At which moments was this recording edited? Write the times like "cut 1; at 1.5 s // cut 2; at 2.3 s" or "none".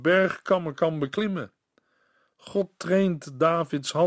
none